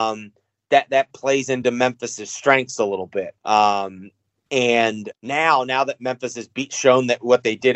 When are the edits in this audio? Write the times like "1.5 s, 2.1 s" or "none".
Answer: 3.4 s, 5.1 s